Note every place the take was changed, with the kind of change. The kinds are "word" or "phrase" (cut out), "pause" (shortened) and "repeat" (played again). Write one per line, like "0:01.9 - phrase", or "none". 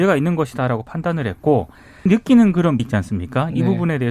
0:02.1 - word
0:02.8 - word